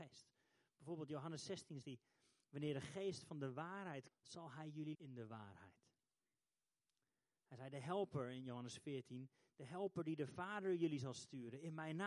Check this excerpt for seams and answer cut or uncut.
cut